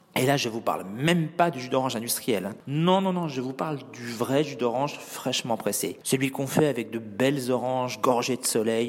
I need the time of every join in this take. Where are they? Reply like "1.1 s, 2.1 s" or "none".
none